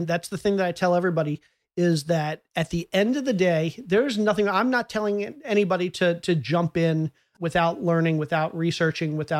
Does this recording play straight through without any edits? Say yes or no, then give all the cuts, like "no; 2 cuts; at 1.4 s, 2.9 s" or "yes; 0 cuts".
yes; 0 cuts